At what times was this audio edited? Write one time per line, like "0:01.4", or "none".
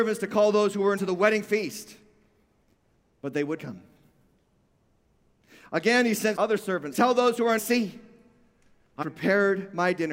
0:01.0
0:03.6
0:06.4
0:06.9
0:07.6
0:09.0